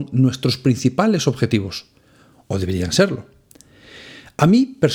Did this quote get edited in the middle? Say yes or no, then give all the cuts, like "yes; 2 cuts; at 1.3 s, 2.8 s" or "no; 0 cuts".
no; 0 cuts